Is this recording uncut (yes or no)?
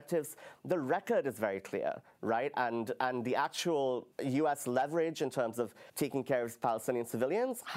no